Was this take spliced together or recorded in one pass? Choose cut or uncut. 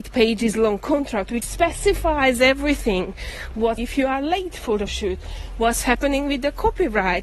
cut